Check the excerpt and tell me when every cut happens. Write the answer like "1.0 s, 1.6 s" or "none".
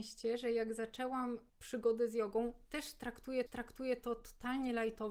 1.5 s, 3.5 s